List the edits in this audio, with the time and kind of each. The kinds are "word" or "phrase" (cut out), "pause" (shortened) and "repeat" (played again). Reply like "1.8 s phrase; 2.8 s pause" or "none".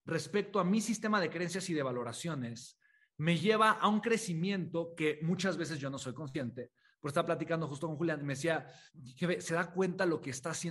none